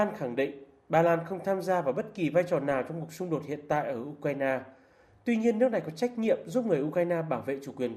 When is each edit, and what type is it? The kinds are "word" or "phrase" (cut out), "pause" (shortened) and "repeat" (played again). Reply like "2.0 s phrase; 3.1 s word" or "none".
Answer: none